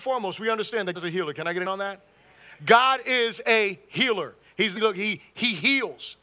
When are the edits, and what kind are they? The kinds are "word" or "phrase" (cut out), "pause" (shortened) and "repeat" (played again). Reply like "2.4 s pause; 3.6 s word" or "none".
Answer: 0.9 s word; 1.6 s word; 4.8 s word